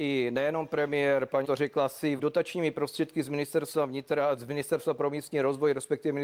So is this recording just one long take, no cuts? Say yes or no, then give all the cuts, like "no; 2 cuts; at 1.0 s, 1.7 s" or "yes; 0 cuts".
no; 2 cuts; at 1.4 s, 2.2 s